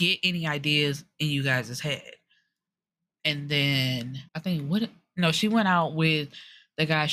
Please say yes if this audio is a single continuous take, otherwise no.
no